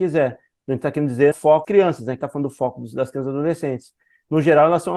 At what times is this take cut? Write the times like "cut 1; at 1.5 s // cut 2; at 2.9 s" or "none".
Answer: cut 1; at 1.3 s // cut 2; at 1.6 s // cut 3; at 2.2 s